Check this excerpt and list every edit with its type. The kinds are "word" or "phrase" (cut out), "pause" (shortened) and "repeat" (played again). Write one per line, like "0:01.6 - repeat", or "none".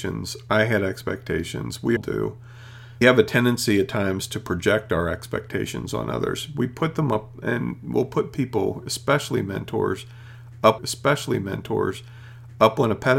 0:02.0 - word
0:03.0 - word
0:10.8 - repeat

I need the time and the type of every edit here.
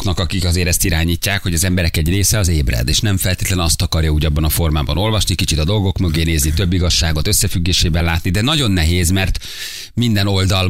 none

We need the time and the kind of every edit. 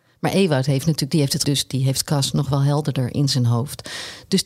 0:01.4 - word

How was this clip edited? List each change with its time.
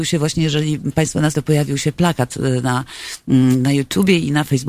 0:01.3 - word

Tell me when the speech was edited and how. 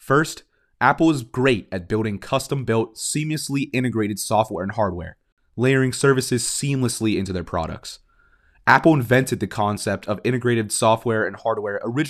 none

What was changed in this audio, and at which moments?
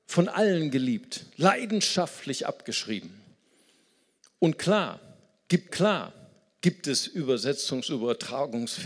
0:05.7 - repeat

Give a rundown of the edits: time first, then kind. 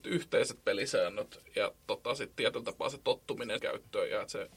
0:02.3 - word
0:03.6 - word

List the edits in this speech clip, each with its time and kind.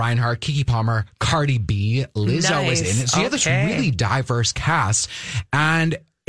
none

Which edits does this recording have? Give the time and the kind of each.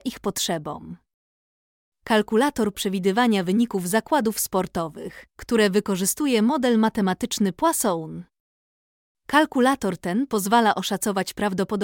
0:02.7 - phrase
0:05.3 - pause

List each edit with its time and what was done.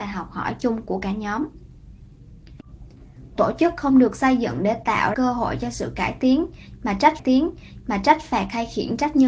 0:03.4 - word
0:05.1 - word
0:07.2 - repeat

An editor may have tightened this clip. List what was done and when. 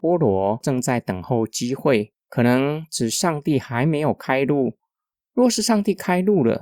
0:02.2 - pause

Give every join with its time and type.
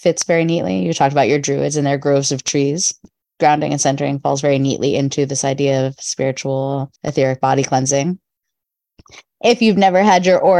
0:07.0 - pause

